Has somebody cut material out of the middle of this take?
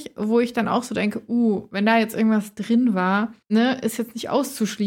yes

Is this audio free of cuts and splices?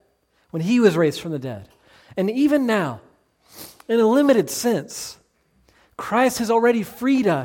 yes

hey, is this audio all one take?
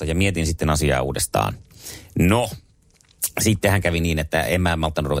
yes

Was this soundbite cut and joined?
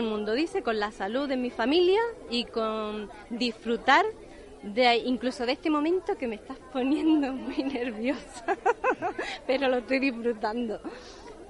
no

